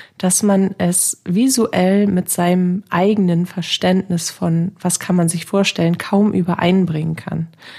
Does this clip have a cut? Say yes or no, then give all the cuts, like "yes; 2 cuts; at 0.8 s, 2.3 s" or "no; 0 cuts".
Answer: no; 0 cuts